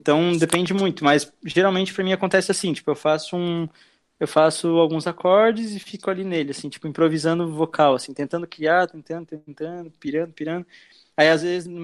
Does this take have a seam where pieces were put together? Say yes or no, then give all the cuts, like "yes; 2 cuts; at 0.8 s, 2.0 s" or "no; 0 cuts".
no; 0 cuts